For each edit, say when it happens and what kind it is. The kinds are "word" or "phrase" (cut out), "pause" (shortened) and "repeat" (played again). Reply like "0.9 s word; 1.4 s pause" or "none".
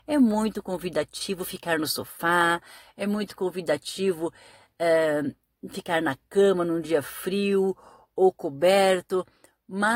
none